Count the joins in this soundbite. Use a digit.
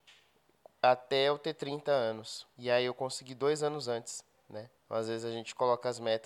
2